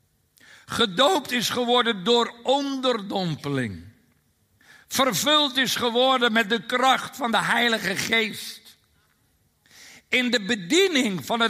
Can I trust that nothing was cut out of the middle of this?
yes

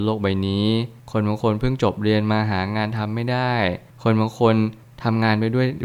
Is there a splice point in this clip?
no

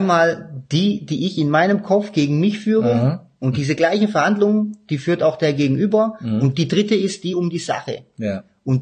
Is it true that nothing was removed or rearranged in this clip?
yes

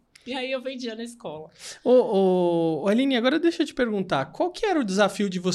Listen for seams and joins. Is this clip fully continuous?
yes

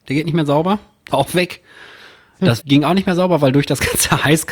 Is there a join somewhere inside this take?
yes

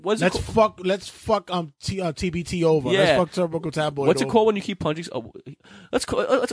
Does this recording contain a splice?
no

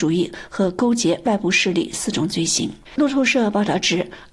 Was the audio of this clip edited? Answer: yes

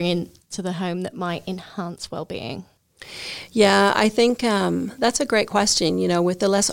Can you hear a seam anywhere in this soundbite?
no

